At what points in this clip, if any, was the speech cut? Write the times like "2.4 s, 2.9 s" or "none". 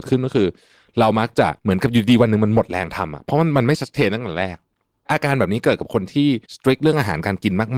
1.6 s, 6.4 s